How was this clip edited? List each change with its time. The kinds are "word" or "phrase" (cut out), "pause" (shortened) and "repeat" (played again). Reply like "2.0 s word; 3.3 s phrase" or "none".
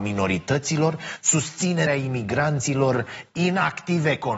1.9 s word